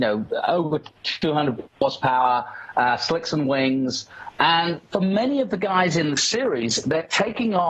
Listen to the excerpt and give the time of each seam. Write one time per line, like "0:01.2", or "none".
none